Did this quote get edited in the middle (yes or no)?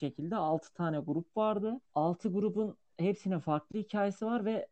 yes